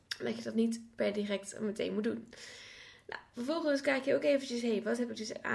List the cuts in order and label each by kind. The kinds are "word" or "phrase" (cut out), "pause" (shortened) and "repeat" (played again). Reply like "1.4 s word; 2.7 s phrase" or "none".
none